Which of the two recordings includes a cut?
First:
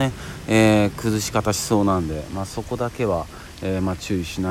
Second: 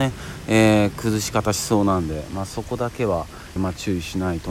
second; 1 cut; at 3.6 s

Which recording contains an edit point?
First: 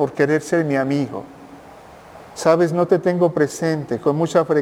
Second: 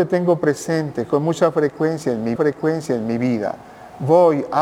second; 1 cut; at 2.4 s

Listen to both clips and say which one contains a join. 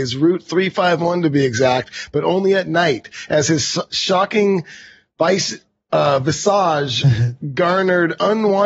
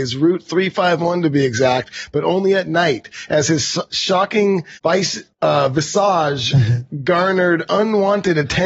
second; 2 cuts; at 4.8 s, 5.3 s

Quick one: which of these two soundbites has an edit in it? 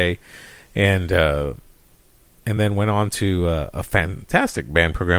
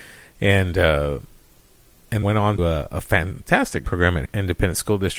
second; 4 cuts; at 2.2 s, 2.6 s, 3.8 s, 4.3 s

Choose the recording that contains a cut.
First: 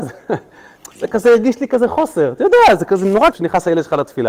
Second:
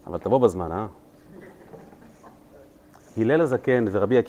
first; 2 cuts; at 0.9 s, 3.3 s

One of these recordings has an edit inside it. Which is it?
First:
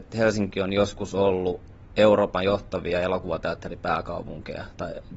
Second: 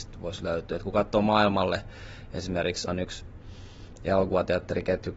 second; 1 cut; at 2.9 s

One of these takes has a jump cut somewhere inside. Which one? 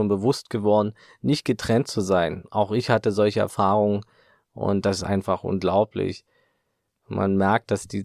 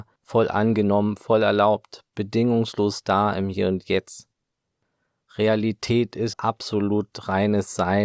second; 1 cut; at 6.3 s

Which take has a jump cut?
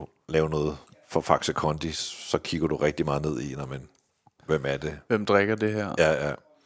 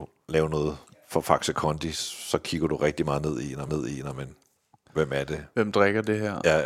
second; 1 cut; at 3.7 s

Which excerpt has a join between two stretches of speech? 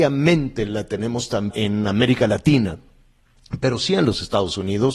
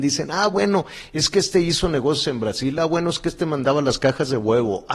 first; 1 cut; at 1.5 s

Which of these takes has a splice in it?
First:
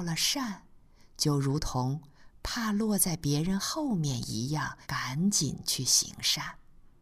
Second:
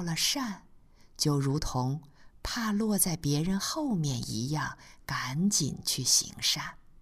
first; 1 cut; at 4.8 s

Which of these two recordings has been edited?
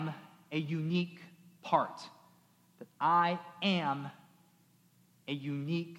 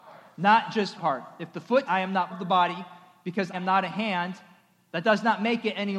second; 4 cuts; at 1.0 s, 1.8 s, 2.3 s, 3.5 s

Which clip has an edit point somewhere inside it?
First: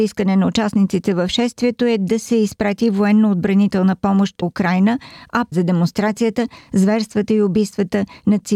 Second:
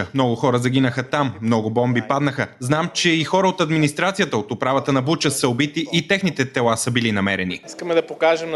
first; 2 cuts; at 4.4 s, 5.5 s

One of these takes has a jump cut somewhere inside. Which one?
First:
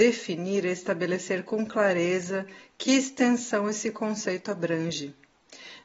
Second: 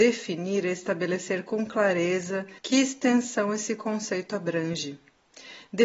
second; 1 cut; at 2.6 s

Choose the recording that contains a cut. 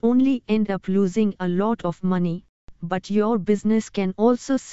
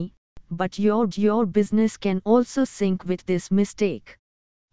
second; 1 cut; at 1.1 s

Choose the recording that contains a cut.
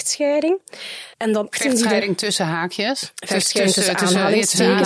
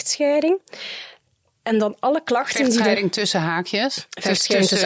first; 2 cuts; at 1.1 s, 1.5 s

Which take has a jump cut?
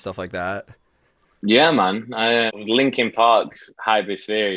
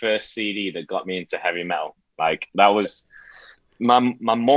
first; 1 cut; at 2.5 s

